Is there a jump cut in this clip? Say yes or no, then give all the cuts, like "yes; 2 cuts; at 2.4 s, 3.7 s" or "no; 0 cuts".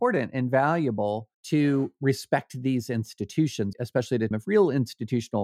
yes; 3 cuts; at 1.3 s, 3.7 s, 4.3 s